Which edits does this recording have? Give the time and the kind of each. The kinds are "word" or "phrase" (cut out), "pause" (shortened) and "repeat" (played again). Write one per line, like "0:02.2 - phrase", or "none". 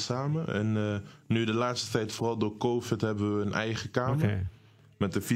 none